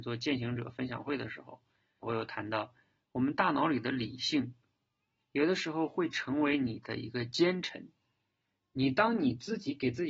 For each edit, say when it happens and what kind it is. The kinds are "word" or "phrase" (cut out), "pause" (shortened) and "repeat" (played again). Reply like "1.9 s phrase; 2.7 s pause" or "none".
2.0 s word